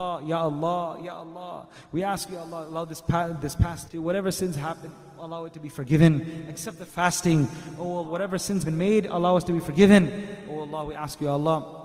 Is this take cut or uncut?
cut